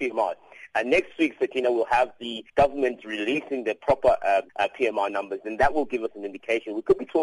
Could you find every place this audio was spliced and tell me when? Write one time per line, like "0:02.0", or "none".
0:02.5
0:04.5

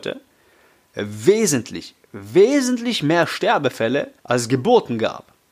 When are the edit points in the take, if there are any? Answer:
0:04.2

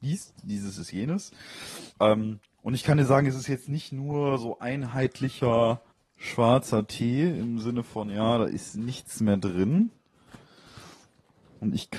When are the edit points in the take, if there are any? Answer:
0:01.9
0:05.9

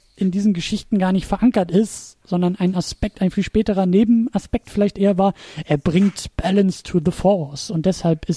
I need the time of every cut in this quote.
0:02.2

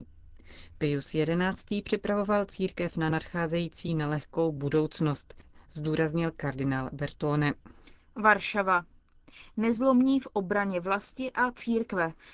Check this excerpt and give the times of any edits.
none

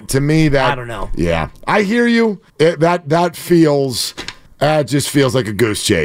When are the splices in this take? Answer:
0:02.5
0:04.5

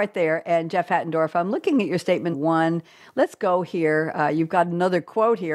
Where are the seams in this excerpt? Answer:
0:02.3

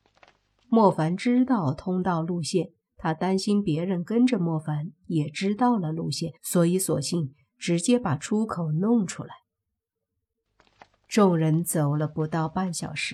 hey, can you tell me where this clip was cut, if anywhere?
0:06.4

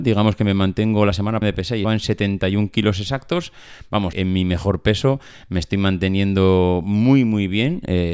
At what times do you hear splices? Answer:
0:01.4
0:01.8
0:04.1

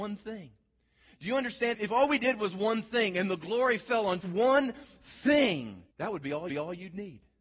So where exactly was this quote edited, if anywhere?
0:01.7
0:04.2
0:05.9
0:06.5

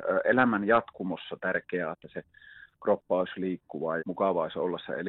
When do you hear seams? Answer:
0:01.9
0:04.0

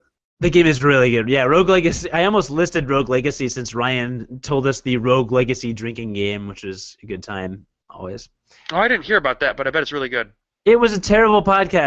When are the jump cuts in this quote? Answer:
none

